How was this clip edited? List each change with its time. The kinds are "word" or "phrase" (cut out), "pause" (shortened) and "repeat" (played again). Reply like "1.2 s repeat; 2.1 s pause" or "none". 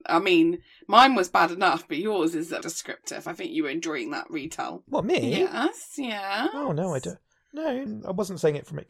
2.6 s word; 7.9 s phrase